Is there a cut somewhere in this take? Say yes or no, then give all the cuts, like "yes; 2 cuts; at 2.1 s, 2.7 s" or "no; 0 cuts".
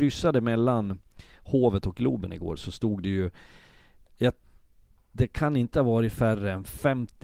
no; 0 cuts